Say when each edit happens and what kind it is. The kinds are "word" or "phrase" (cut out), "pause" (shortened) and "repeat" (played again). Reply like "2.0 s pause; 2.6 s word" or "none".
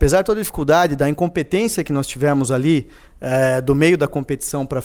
none